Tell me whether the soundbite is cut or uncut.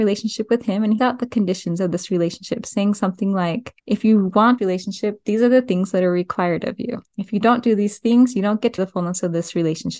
cut